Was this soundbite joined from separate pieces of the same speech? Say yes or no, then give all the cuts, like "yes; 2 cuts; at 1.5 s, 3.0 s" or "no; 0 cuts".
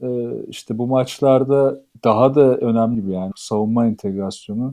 yes; 3 cuts; at 1.9 s, 2.9 s, 3.3 s